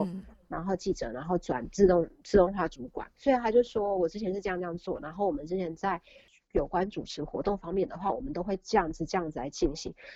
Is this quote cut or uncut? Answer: cut